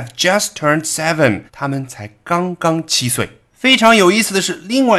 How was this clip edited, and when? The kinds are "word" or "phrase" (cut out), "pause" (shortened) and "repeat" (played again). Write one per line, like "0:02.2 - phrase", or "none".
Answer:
0:01.5 - pause
0:03.5 - pause